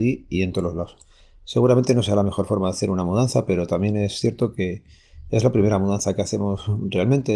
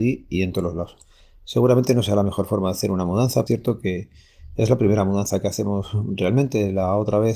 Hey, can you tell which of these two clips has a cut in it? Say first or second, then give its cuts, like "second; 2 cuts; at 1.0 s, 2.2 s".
second; 1 cut; at 3.5 s